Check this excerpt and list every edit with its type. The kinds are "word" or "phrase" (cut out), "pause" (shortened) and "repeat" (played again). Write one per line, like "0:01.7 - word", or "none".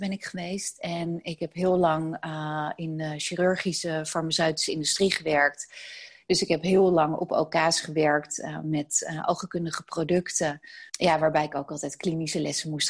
0:10.9 - pause